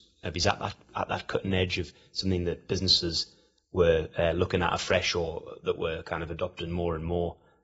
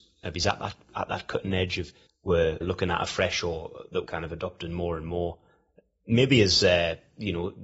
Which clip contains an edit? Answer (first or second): second